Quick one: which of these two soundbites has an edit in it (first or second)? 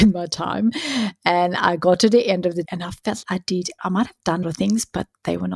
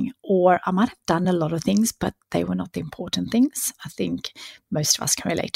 first